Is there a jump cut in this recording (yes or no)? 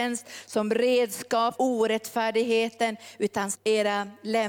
yes